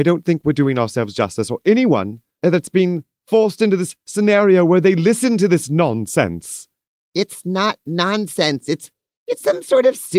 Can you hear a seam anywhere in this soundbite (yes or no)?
no